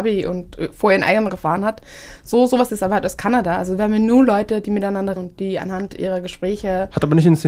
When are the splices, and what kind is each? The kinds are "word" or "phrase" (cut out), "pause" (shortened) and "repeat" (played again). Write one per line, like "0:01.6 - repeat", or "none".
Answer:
0:01.3 - word
0:02.7 - word
0:05.2 - word